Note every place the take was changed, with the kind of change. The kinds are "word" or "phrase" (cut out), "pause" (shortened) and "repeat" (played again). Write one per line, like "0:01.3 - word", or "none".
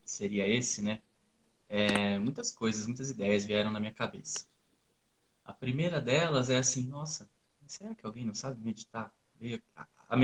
none